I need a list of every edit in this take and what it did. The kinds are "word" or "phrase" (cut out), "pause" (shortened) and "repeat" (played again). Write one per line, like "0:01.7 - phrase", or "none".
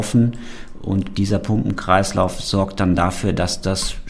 none